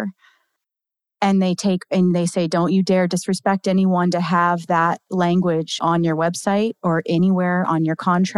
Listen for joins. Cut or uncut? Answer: cut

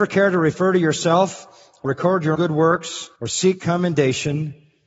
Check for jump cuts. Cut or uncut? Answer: cut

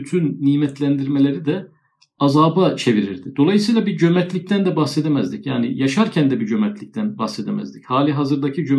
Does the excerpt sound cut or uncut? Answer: uncut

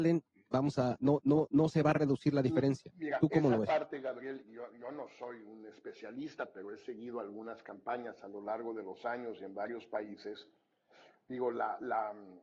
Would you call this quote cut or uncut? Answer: uncut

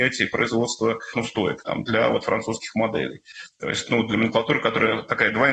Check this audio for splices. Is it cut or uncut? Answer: cut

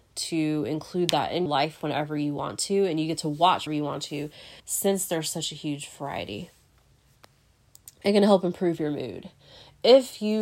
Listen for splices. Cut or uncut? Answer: cut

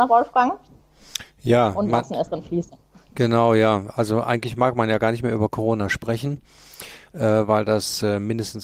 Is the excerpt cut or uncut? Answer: uncut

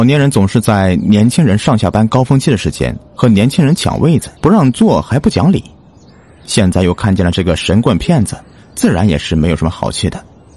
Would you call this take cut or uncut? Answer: cut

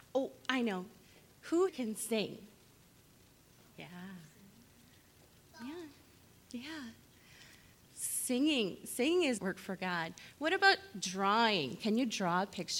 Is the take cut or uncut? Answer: cut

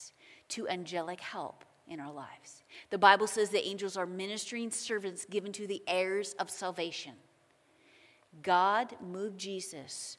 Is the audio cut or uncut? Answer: uncut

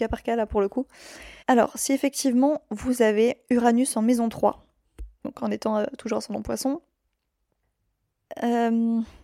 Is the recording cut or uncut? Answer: cut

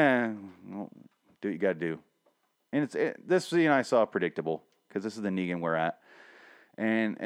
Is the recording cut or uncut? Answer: uncut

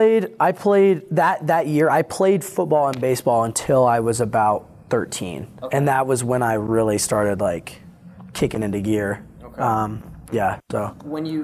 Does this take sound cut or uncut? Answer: uncut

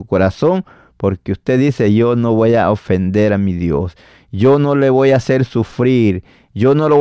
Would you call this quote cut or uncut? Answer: uncut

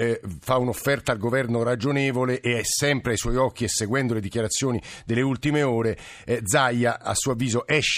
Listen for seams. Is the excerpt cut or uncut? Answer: uncut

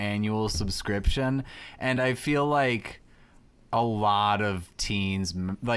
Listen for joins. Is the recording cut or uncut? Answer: uncut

